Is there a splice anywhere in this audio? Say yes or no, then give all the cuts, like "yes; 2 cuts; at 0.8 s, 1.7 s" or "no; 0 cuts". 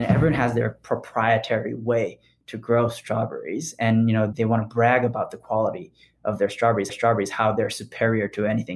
yes; 1 cut; at 6.9 s